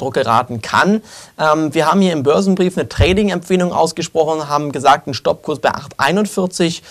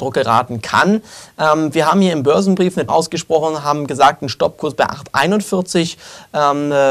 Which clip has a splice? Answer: second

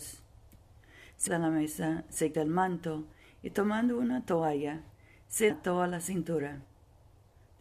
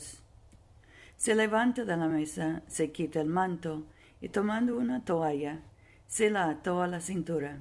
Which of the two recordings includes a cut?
first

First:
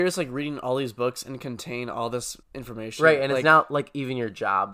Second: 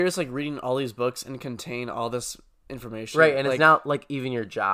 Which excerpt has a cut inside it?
first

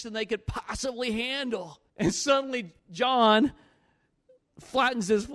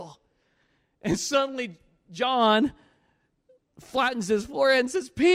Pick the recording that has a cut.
first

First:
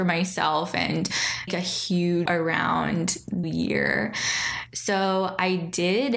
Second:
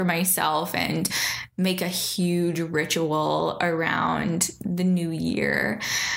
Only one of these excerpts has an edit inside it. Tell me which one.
first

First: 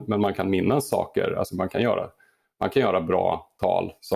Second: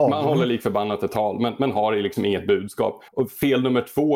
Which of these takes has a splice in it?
second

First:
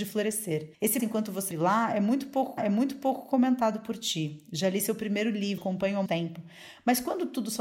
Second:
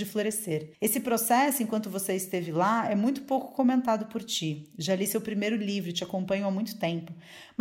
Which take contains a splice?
first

